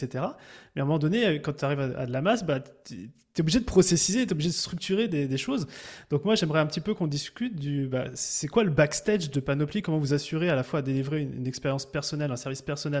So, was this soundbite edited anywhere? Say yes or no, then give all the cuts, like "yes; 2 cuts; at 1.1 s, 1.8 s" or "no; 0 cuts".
no; 0 cuts